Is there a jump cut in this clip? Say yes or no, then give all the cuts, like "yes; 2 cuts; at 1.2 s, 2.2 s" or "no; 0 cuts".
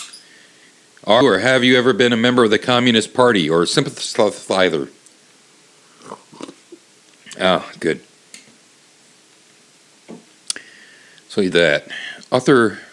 yes; 2 cuts; at 1.2 s, 11.5 s